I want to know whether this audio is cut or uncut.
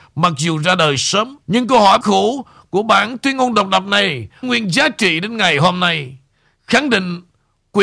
cut